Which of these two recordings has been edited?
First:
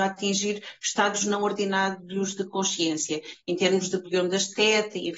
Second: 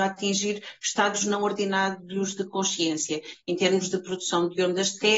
first; 1 cut; at 4.0 s

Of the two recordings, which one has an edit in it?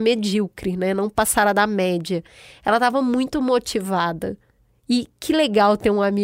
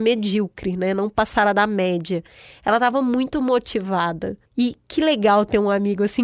second; 1 cut; at 4.5 s

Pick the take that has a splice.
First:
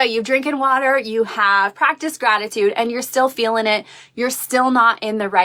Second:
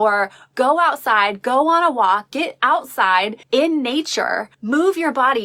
second; 2 cuts; at 3.4 s, 4.5 s

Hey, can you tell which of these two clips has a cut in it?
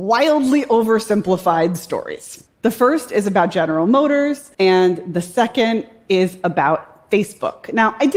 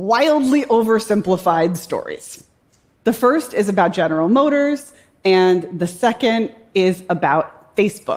first; 2 cuts; at 2.5 s, 4.5 s

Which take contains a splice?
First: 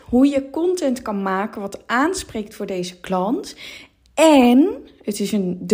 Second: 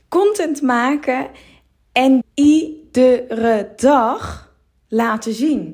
second; 1 cut; at 2.2 s

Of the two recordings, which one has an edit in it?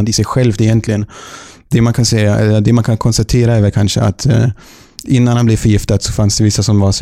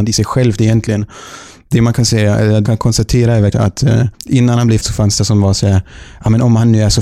second; 5 cuts; at 2.6 s, 3.5 s, 4.1 s, 4.8 s, 5.2 s

